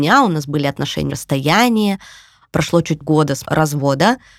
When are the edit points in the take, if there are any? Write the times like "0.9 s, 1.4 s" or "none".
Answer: 1.1 s, 3.0 s, 3.4 s

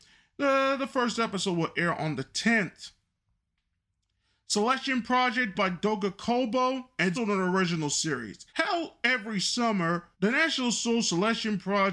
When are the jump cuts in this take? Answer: 5.5 s, 7.1 s, 8.5 s, 10.1 s

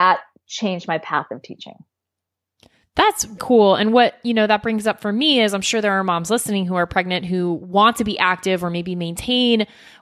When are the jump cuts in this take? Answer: 3.4 s

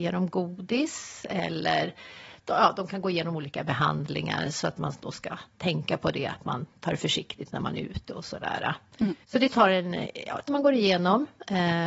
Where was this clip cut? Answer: 9.2 s, 10.5 s

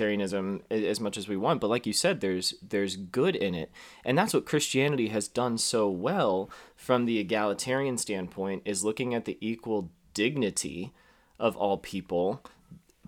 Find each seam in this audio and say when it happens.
none

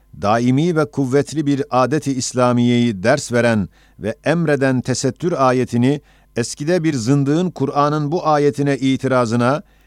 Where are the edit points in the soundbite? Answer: none

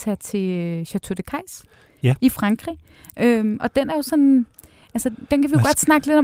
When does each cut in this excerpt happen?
none

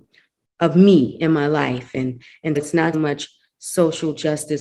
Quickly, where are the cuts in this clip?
2.6 s, 2.9 s

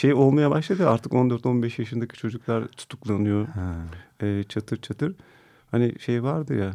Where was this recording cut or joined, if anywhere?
none

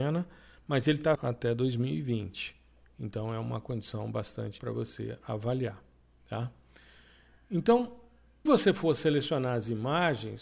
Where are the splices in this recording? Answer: 1.1 s, 4.6 s, 8.5 s

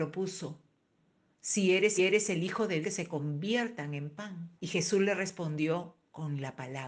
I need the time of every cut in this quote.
2.0 s, 2.8 s, 4.6 s

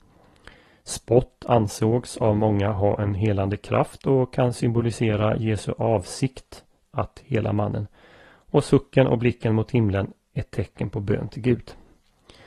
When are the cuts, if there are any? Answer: none

